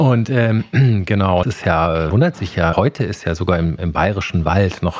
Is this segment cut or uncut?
cut